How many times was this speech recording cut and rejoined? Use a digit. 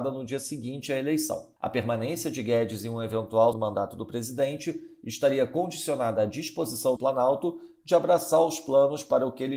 3